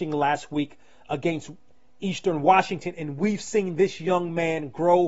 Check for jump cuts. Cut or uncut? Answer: uncut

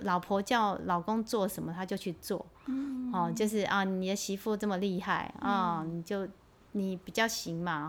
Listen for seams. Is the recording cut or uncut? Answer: uncut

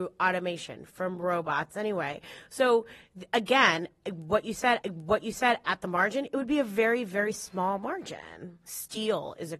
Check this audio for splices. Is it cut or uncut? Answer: cut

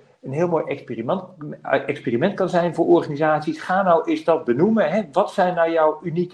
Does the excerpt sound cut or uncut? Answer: uncut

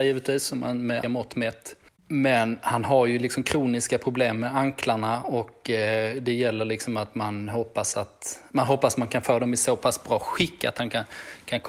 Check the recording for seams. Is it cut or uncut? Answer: cut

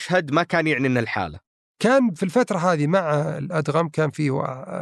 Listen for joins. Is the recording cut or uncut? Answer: uncut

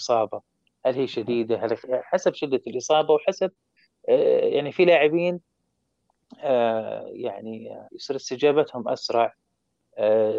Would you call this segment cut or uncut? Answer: cut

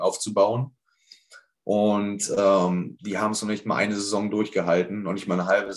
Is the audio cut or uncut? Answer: cut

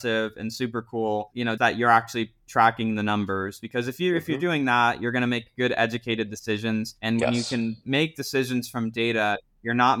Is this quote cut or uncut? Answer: cut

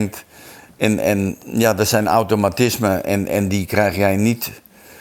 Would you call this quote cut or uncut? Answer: uncut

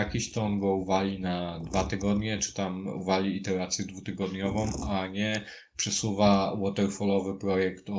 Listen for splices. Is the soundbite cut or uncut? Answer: uncut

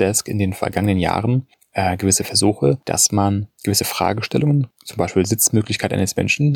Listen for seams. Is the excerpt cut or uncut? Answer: uncut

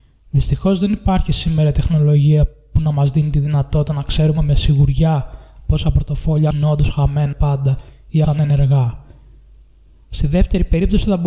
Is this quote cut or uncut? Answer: cut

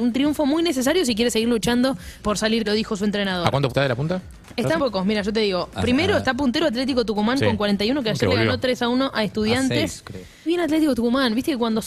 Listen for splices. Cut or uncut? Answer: cut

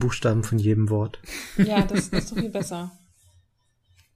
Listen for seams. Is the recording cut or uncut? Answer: uncut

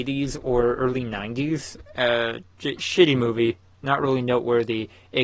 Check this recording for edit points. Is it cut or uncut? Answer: uncut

